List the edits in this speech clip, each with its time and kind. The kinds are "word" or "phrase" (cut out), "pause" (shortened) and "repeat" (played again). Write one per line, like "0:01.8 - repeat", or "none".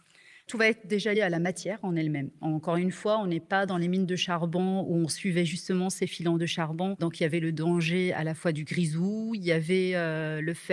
0:01.1 - word